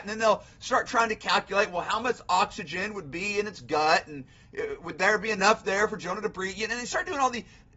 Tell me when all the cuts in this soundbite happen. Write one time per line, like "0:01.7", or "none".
none